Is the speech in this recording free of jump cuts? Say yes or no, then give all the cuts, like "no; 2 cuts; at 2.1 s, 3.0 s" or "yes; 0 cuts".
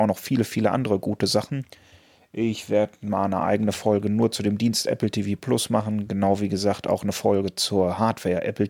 yes; 0 cuts